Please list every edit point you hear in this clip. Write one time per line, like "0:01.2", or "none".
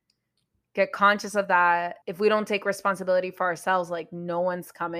0:02.0